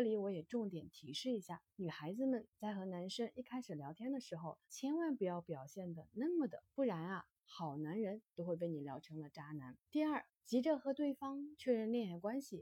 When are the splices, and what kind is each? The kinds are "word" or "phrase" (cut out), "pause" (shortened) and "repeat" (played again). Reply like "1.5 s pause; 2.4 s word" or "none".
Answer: 1.7 s pause; 4.6 s pause; 6.6 s word; 9.9 s pause; 10.3 s pause